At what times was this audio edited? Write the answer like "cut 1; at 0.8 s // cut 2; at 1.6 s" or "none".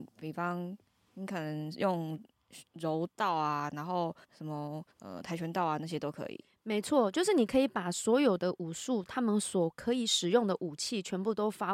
cut 1; at 4.2 s // cut 2; at 4.9 s